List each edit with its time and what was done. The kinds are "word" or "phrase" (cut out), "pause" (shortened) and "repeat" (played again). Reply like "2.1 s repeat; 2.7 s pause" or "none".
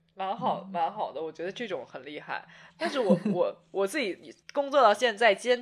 4.4 s pause